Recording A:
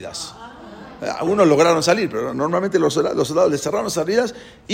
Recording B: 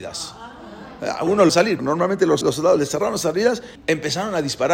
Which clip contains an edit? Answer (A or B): B